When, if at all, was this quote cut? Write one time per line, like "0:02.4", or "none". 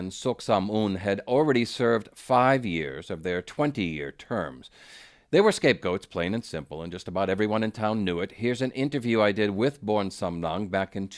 none